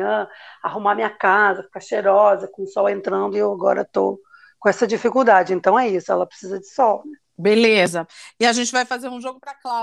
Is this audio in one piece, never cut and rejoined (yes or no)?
yes